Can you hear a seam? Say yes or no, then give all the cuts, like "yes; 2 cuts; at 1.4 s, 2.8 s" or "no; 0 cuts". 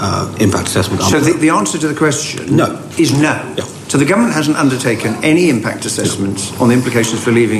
no; 0 cuts